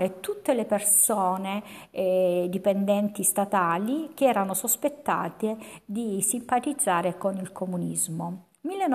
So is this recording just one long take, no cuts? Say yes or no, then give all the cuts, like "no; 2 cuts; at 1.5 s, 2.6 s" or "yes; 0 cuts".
yes; 0 cuts